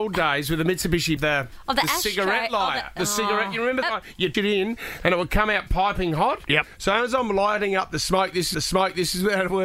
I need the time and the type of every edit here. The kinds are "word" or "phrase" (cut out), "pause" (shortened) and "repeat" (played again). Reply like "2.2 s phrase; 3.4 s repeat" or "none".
1.2 s phrase; 3.8 s word; 4.3 s word; 8.5 s repeat